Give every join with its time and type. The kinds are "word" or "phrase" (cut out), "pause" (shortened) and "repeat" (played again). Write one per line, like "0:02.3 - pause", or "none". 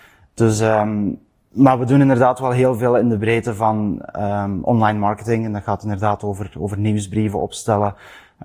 none

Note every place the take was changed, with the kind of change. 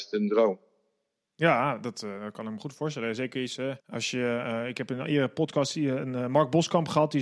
0:03.8 - pause

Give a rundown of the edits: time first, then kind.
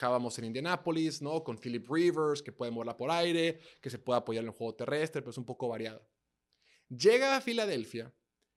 0:03.0 - word

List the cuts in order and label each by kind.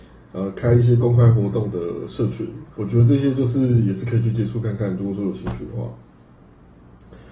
0:02.7 - pause

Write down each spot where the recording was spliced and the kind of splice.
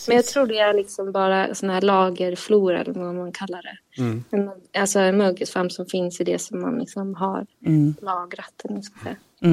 none

